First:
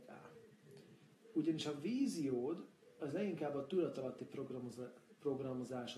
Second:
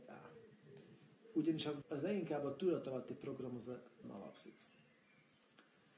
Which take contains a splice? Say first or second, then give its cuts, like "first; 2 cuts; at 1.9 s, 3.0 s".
second; 2 cuts; at 1.8 s, 4.0 s